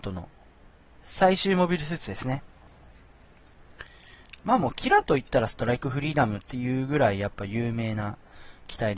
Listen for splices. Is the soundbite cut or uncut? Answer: cut